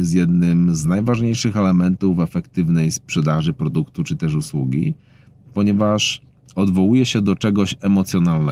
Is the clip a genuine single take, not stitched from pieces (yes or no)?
yes